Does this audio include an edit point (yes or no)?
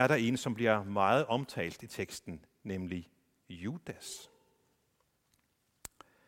no